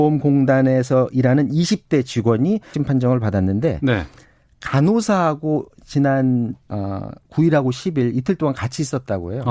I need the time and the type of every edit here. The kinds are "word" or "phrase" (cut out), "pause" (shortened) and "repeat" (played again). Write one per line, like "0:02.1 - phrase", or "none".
0:02.7 - word